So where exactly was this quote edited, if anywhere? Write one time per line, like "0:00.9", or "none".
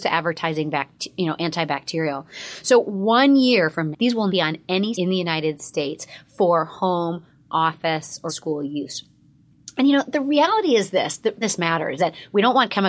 0:03.9
0:04.3
0:04.9
0:08.3
0:11.4
0:12.0